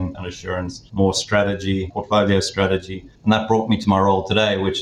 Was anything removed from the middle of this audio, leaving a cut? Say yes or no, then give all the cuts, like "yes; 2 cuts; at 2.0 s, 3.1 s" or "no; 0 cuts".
yes; 1 cut; at 3.1 s